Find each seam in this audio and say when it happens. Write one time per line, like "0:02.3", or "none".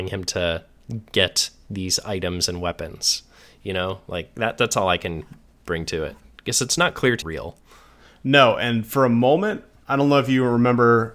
0:07.2